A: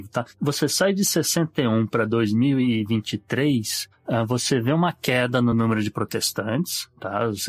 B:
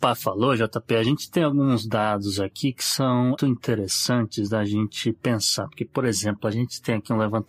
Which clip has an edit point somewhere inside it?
B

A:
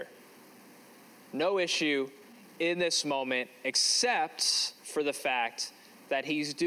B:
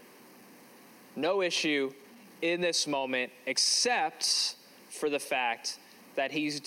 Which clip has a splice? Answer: A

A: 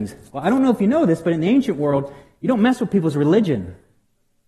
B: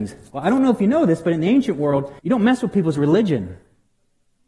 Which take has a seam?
B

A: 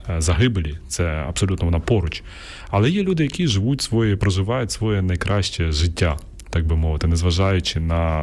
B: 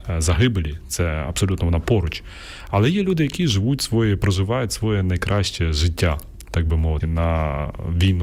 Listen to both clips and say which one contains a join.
B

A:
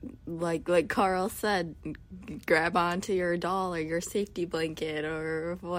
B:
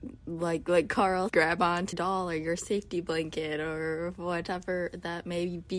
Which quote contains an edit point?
B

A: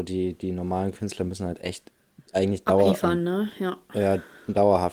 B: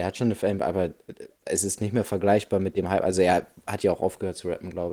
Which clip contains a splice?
B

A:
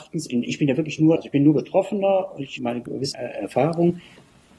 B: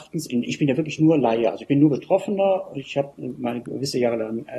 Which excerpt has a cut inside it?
A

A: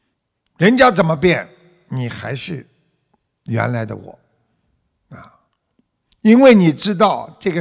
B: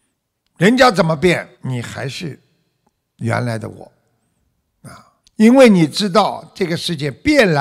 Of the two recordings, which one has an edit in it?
B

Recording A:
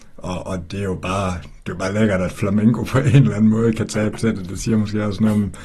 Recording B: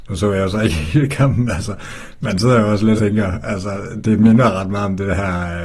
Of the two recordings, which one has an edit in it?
B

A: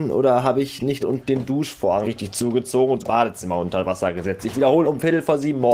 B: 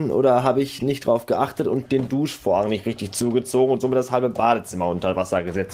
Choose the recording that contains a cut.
A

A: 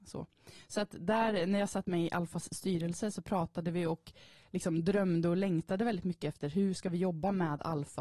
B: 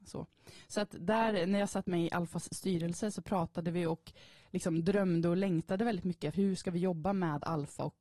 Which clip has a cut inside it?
B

